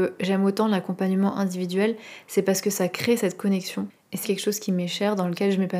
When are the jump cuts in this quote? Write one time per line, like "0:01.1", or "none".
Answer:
0:04.2